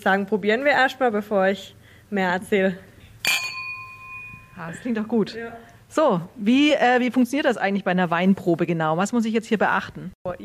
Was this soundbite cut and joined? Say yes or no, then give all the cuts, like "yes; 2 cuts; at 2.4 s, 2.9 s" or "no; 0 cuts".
no; 0 cuts